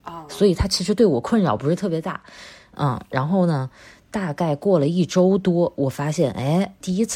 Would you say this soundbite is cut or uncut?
uncut